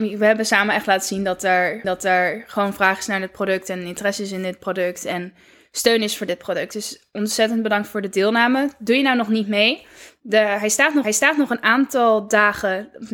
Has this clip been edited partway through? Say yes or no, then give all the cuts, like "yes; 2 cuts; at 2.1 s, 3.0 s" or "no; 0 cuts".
yes; 2 cuts; at 1.8 s, 11.0 s